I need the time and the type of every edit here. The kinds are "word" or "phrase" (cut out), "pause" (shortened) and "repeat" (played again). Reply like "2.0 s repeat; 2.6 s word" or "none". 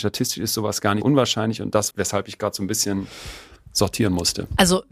1.0 s word; 1.9 s word